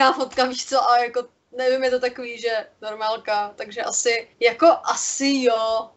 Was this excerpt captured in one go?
no; 1 cut; at 4.3 s

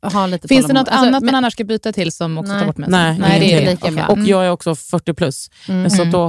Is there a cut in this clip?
no; 0 cuts

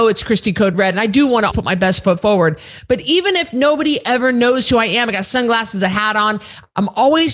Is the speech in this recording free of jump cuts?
no; 1 cut; at 1.5 s

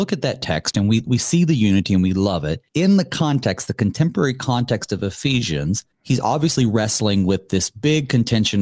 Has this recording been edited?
yes; 2 cuts; at 2.7 s, 5.9 s

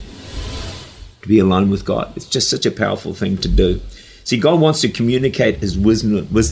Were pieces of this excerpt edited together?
no; 0 cuts

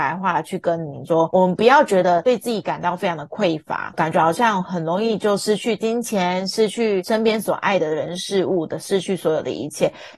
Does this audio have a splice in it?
yes; 1 cut; at 3.9 s

